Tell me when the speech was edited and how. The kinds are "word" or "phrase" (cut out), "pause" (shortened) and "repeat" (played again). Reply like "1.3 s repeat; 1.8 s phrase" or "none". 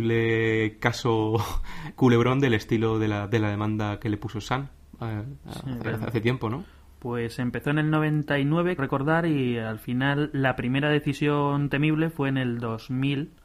5.8 s word; 8.8 s word